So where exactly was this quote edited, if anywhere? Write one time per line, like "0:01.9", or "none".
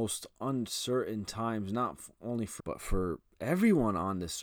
0:02.6